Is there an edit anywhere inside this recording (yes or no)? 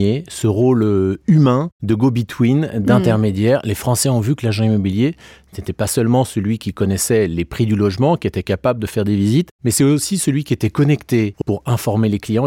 yes